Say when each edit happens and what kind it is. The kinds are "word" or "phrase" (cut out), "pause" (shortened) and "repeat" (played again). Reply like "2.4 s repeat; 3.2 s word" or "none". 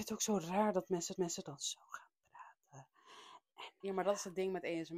1.2 s repeat; 3.8 s word